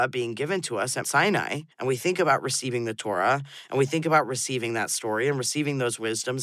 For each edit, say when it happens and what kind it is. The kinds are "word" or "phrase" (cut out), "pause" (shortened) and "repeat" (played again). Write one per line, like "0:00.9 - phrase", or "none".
0:01.0 - word
0:01.7 - pause